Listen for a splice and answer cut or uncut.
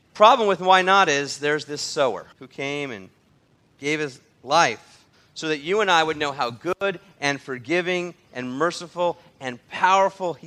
cut